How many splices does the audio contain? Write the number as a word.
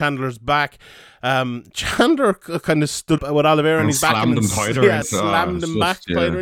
two